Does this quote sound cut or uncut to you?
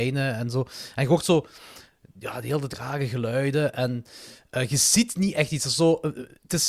uncut